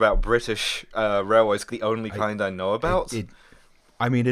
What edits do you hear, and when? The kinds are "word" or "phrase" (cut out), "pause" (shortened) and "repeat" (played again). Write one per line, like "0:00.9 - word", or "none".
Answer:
0:01.7 - word